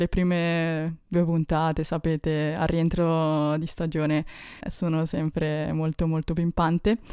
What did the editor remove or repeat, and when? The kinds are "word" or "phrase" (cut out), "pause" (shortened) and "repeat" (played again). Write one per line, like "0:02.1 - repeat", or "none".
0:04.6 - word